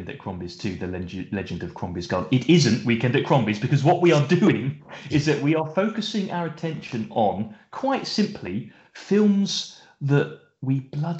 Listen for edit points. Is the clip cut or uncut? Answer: uncut